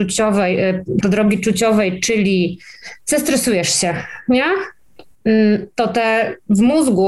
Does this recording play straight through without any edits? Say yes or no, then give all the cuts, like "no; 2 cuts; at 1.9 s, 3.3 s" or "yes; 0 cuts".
no; 1 cut; at 1.0 s